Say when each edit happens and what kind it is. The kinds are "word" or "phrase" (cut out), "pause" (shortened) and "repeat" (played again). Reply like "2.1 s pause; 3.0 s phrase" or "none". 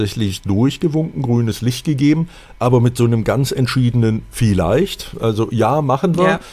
none